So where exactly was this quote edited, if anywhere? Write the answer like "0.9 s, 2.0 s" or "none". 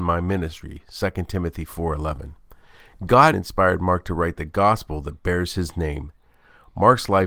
3.3 s